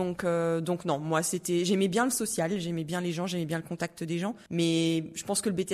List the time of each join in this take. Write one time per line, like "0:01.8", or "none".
0:04.5